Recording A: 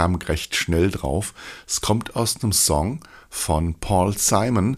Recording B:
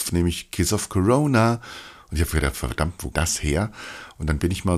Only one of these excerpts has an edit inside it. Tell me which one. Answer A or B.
B